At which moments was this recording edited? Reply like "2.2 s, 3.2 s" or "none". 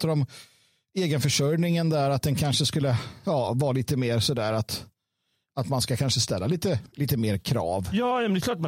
none